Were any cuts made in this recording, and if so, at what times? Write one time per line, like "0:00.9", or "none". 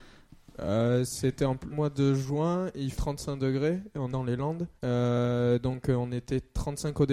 0:01.7
0:02.9
0:04.1
0:04.8